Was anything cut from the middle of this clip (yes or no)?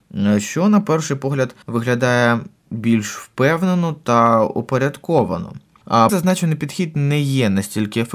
yes